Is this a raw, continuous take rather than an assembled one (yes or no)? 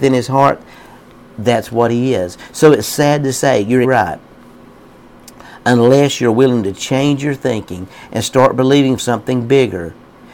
no